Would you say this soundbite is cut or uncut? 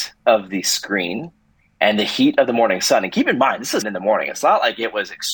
cut